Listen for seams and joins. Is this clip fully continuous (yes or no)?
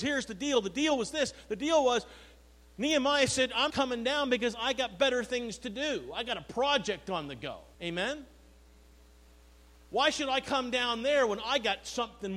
no